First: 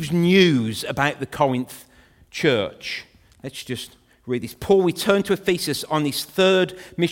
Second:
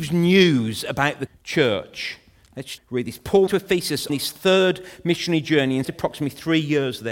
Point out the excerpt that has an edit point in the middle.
second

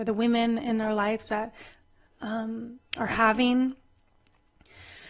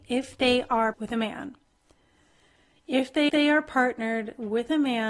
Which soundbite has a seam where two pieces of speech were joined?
second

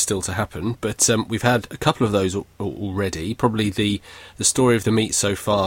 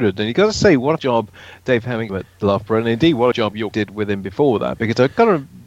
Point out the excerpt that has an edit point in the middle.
second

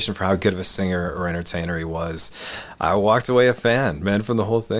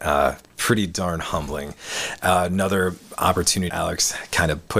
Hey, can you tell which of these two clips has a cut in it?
second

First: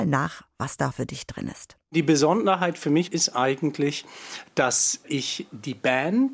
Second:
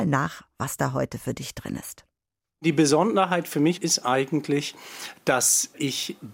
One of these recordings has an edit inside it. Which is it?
first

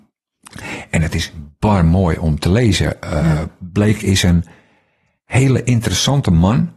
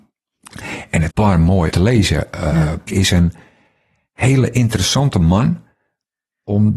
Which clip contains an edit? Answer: second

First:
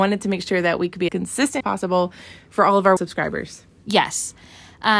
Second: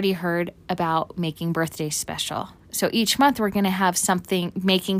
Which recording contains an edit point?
first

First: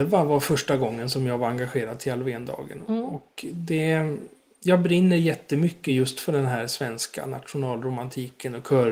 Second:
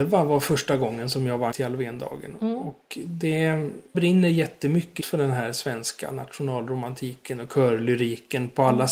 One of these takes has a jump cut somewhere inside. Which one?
second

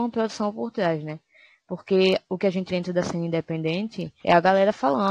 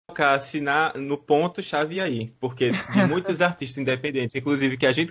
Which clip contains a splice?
first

